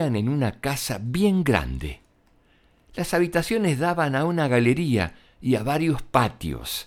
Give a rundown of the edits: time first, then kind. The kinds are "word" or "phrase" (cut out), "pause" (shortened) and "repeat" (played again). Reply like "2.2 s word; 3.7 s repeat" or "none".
none